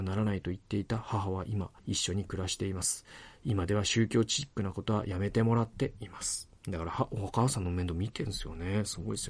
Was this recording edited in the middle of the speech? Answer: yes; 2 cuts; at 1.8 s, 6.6 s

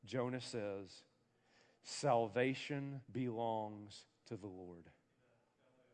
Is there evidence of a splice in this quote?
yes; 1 cut; at 3.0 s

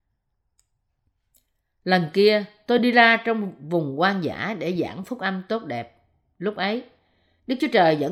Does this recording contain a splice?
no; 0 cuts

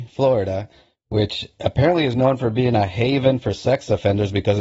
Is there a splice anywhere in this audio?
no; 0 cuts

